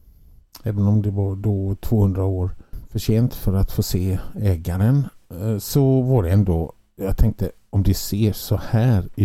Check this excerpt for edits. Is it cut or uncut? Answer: uncut